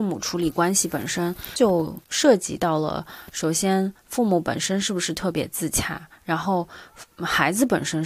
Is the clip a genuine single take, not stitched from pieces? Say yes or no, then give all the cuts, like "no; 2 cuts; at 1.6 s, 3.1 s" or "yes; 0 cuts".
no; 1 cut; at 2.0 s